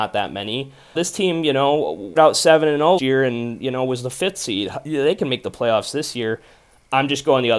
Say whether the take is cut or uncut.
cut